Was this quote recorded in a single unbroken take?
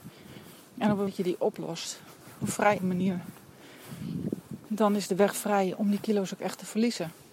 no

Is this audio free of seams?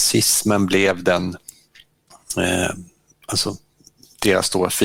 yes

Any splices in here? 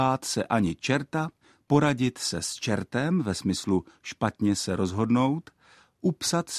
no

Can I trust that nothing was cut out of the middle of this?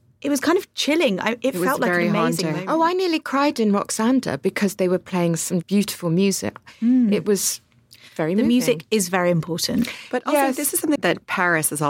no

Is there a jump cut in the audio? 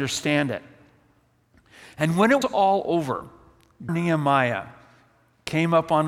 yes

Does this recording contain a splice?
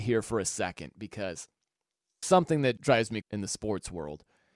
yes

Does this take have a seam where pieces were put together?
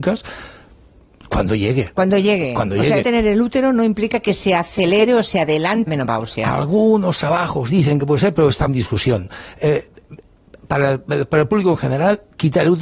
yes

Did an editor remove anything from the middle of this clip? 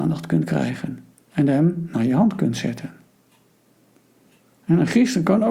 yes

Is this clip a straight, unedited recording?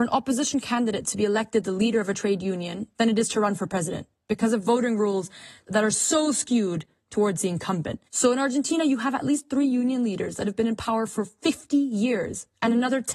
no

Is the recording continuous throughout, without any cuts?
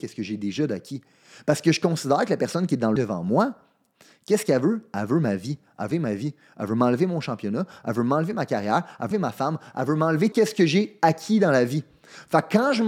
no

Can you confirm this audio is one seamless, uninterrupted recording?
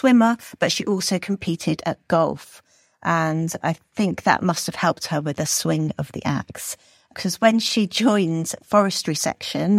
yes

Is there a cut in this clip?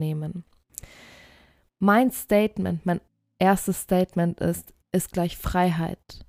yes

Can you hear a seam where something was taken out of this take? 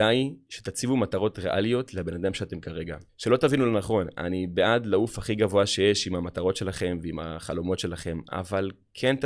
yes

